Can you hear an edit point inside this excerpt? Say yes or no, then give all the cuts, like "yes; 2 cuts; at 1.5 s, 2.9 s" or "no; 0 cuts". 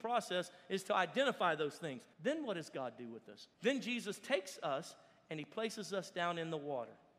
yes; 2 cuts; at 2.1 s, 3.5 s